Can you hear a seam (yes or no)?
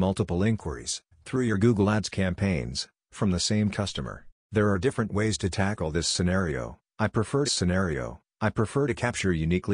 yes